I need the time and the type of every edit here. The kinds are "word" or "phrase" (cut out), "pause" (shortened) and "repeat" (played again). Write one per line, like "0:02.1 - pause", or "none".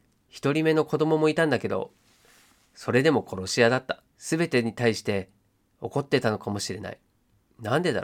0:04.1 - pause